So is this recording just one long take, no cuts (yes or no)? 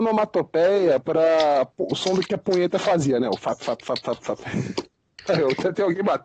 yes